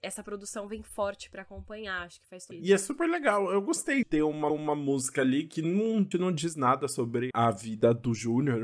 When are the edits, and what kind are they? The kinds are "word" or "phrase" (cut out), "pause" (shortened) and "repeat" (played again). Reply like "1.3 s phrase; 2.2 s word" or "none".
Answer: 2.5 s word; 4.0 s word; 4.5 s repeat; 6.1 s word; 7.3 s word